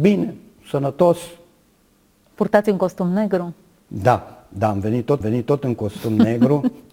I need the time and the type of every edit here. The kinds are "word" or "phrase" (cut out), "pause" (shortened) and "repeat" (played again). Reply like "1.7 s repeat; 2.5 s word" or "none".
5.2 s repeat